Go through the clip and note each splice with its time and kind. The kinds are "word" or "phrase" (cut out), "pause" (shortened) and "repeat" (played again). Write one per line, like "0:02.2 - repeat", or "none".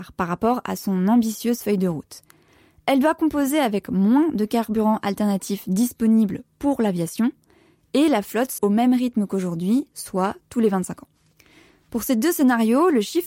0:08.6 - word